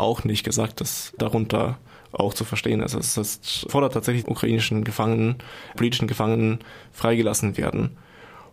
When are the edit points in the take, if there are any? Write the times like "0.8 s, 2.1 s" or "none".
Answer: 1.2 s, 3.7 s, 4.2 s, 5.7 s